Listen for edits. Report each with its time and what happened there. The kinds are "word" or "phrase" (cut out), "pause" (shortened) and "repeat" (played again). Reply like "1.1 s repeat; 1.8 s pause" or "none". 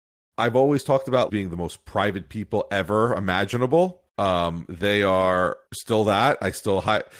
1.3 s word; 4.1 s pause; 5.7 s pause